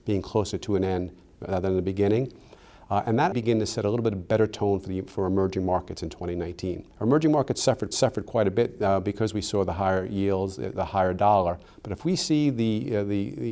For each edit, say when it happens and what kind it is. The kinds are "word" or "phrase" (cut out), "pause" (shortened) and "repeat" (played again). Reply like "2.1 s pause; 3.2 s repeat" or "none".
3.3 s phrase; 6.9 s pause; 7.9 s repeat